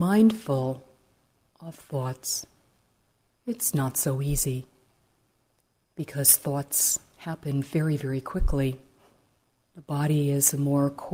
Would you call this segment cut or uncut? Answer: uncut